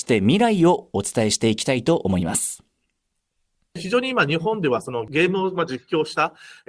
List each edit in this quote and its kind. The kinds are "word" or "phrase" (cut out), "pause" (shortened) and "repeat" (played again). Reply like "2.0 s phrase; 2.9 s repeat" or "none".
none